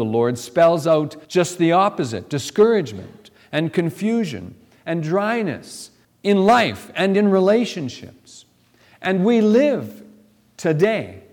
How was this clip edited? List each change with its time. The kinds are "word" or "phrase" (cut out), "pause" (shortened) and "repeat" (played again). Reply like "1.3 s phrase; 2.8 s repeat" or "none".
1.2 s pause; 6.0 s pause